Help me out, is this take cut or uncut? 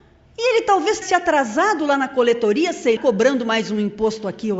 cut